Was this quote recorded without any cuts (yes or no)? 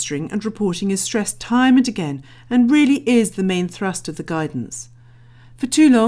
yes